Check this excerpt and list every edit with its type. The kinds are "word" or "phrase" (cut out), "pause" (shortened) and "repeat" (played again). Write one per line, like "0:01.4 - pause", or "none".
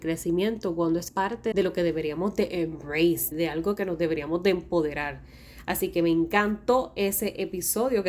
0:01.1 - word
0:01.5 - word
0:03.3 - word